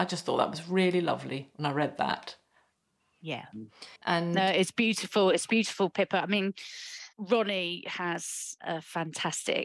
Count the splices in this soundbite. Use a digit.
1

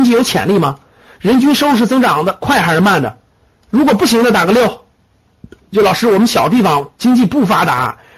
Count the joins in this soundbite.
0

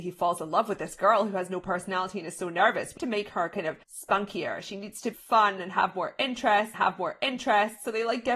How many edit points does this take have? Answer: 4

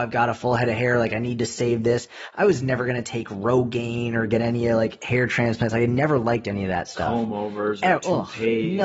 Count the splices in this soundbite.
0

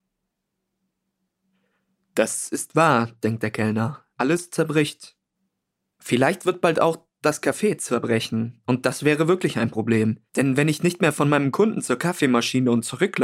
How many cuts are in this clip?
3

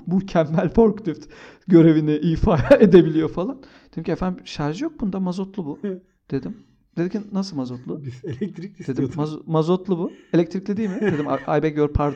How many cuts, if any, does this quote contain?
0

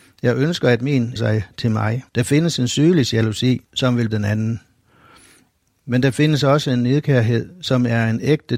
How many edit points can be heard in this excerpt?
4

